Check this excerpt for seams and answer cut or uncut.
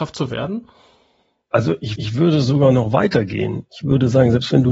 cut